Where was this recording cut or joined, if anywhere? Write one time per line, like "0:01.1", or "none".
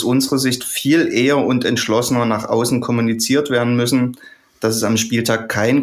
none

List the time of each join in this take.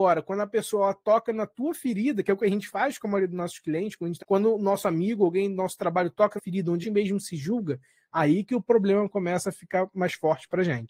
0:04.2
0:06.4
0:06.8

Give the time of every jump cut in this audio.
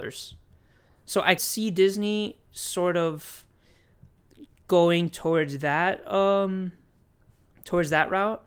0:01.4

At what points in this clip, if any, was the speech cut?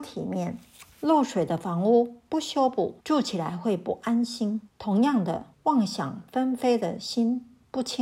0:00.9
0:03.0
0:04.7
0:05.5

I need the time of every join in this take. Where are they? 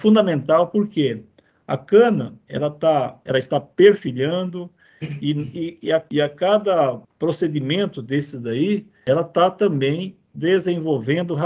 0:03.3
0:07.0

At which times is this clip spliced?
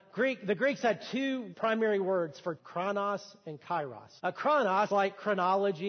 0:01.5
0:02.6
0:04.2
0:04.9

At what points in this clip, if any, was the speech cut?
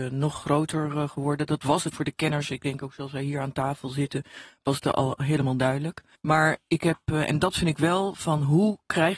0:01.9
0:06.1

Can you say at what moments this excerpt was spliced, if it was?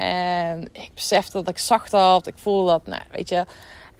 none

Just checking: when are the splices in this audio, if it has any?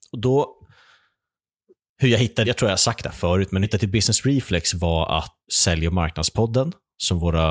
0:02.4
0:03.6
0:05.5

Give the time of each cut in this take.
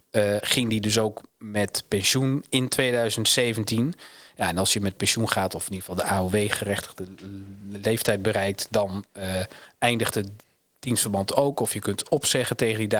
none

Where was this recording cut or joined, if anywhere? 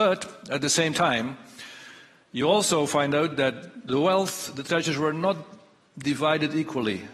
none

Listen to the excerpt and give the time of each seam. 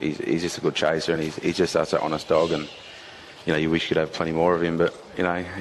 none

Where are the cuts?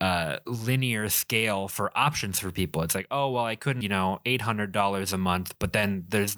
0:03.8

